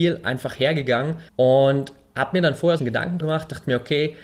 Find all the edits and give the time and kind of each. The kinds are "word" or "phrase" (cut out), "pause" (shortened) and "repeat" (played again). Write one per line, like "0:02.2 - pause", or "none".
0:01.3 - pause
0:02.8 - phrase
0:03.2 - word